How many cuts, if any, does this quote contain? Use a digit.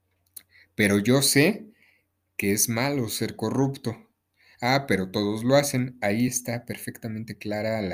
0